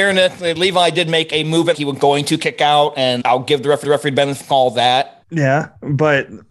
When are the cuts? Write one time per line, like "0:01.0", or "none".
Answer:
0:01.7
0:03.2
0:03.8
0:04.4
0:05.2

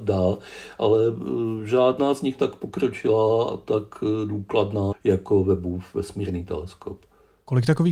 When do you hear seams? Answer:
0:02.4
0:04.9

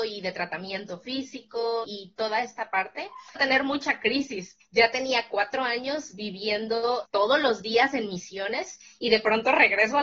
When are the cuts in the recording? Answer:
0:01.8
0:03.4
0:04.6
0:07.0

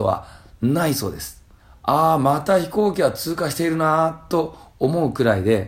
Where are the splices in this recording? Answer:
0:01.6

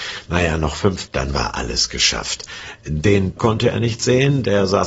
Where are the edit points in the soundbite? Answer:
0:01.1
0:03.4

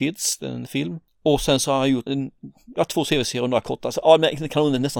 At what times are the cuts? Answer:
0:02.1

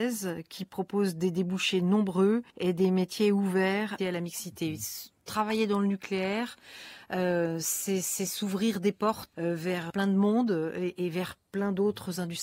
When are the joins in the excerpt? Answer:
0:02.5
0:04.0
0:09.3
0:09.9

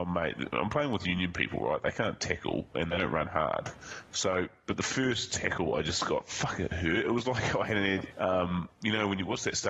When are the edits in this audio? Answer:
0:08.1

